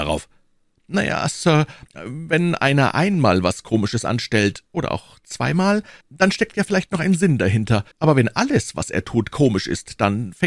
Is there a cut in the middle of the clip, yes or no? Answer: yes